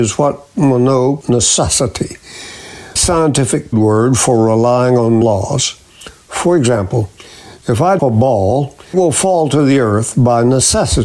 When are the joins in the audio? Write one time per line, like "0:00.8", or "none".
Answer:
0:01.2
0:03.0
0:03.7
0:05.2
0:08.0
0:08.9